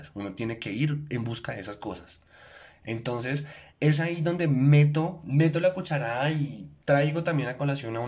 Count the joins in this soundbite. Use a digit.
0